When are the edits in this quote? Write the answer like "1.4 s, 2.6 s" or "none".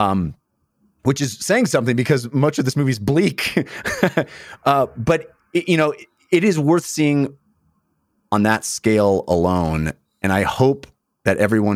none